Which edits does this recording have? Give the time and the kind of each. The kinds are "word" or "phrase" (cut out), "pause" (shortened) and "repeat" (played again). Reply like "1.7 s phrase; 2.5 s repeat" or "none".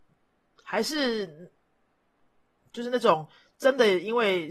none